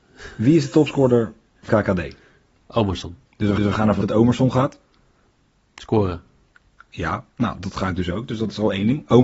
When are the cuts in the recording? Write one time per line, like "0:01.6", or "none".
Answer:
0:01.7
0:03.2
0:03.6
0:04.0
0:06.5